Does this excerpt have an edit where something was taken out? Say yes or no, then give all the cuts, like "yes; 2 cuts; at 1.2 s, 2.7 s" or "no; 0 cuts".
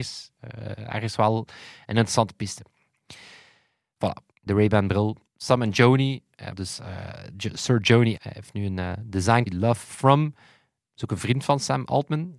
yes; 5 cuts; at 4.3 s, 5.3 s, 6.5 s, 8.2 s, 9.5 s